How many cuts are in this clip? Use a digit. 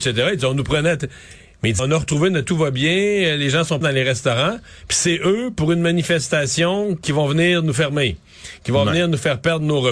3